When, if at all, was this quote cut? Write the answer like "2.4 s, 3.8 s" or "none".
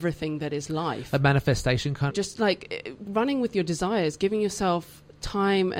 2.1 s